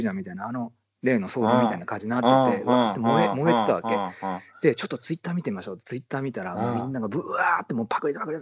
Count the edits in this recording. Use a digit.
0